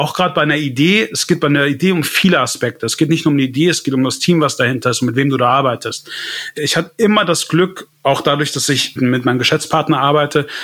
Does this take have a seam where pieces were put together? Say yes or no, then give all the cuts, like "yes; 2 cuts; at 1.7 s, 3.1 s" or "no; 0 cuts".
yes; 2 cuts; at 7.9 s, 9.0 s